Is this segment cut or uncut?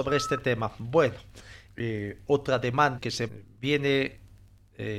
cut